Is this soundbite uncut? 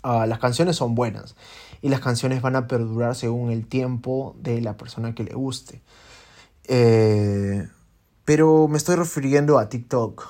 yes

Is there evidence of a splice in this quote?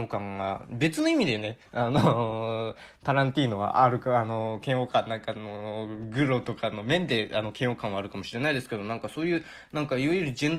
no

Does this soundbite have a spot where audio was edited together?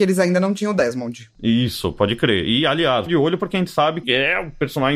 yes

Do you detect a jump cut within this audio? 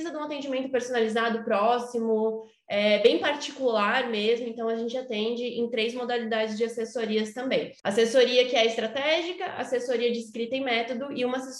yes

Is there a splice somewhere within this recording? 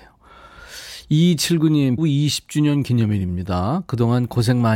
yes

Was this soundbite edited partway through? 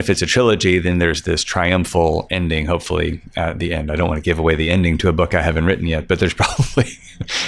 no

